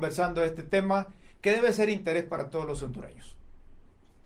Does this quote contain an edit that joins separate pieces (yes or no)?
no